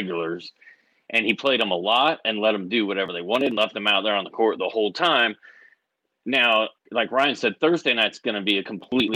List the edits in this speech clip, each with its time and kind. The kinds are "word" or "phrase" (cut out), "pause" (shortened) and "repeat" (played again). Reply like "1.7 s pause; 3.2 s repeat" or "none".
6.8 s pause